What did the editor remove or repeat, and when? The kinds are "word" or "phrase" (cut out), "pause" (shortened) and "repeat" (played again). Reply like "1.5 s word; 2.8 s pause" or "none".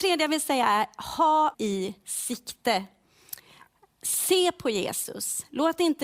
1.5 s word